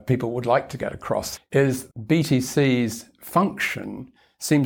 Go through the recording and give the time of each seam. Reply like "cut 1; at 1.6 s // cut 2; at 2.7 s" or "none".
cut 1; at 1.4 s // cut 2; at 1.9 s

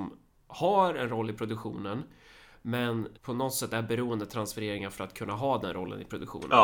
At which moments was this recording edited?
cut 1; at 3.2 s

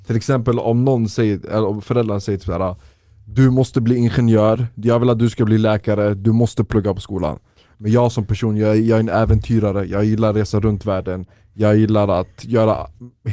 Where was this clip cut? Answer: none

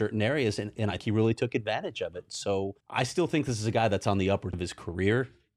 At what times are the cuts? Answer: cut 1; at 1.0 s // cut 2; at 2.8 s // cut 3; at 4.5 s

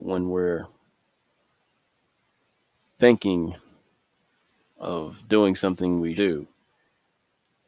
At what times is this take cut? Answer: cut 1; at 6.2 s

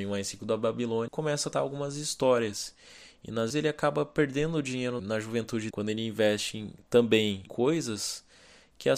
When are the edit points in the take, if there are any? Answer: cut 1; at 1.1 s // cut 2; at 1.5 s // cut 3; at 3.5 s // cut 4; at 5.0 s // cut 5; at 5.7 s // cut 6; at 7.5 s

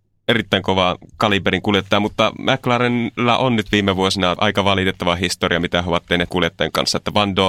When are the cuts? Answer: cut 1; at 4.4 s // cut 2; at 6.3 s

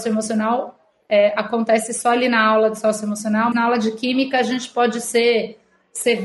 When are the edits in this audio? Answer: cut 1; at 3.5 s

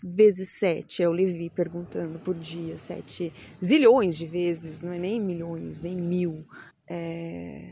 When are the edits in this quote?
cut 1; at 6.7 s

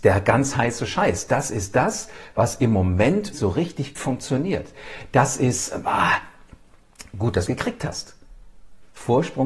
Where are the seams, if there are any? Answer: cut 1; at 3.3 s // cut 2; at 4.0 s // cut 3; at 7.5 s

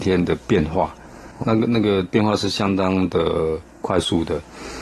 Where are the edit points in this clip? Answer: cut 1; at 1.4 s

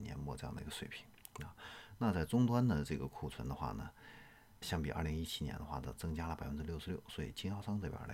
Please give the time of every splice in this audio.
cut 1; at 4.6 s

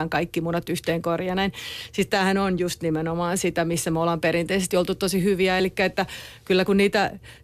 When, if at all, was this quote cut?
none

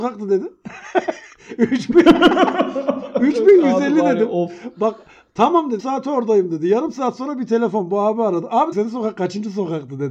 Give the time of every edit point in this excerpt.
cut 1; at 5.8 s // cut 2; at 8.7 s

